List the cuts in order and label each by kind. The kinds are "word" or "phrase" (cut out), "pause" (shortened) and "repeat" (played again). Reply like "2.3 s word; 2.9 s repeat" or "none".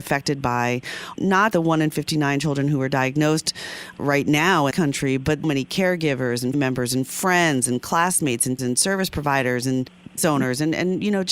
1.1 s word; 1.5 s word; 4.0 s word; 4.7 s word; 5.4 s word; 6.5 s word; 8.6 s word; 10.2 s word